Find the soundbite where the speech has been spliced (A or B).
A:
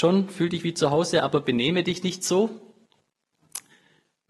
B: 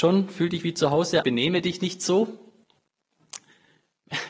B